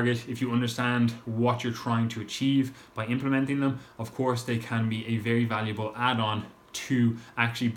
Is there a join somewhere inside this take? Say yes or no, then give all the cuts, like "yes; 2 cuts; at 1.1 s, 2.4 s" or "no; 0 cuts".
no; 0 cuts